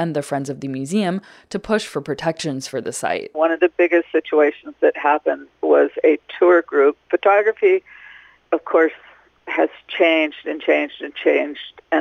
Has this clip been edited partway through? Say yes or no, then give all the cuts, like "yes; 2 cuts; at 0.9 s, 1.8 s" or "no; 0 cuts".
no; 0 cuts